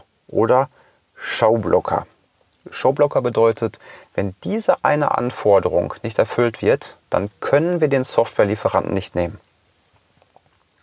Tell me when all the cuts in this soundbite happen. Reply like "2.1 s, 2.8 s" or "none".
none